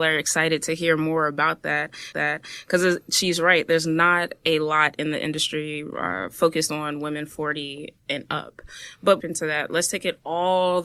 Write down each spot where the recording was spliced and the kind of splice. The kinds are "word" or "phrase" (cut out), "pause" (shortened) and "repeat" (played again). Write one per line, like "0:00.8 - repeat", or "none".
0:02.1 - repeat
0:08.0 - pause
0:09.2 - phrase